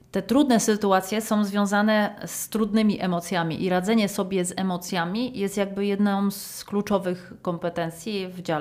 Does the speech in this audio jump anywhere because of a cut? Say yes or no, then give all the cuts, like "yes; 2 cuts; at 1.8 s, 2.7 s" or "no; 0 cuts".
no; 0 cuts